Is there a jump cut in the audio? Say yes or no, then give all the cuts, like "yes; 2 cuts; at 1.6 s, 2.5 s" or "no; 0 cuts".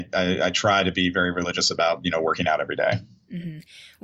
no; 0 cuts